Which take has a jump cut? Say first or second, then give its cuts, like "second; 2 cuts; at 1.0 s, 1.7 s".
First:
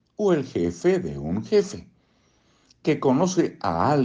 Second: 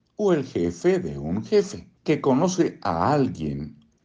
second; 1 cut; at 2.0 s